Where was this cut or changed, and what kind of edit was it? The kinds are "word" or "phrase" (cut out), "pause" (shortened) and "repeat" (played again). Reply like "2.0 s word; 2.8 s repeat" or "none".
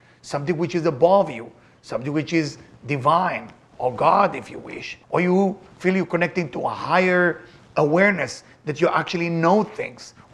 5.0 s pause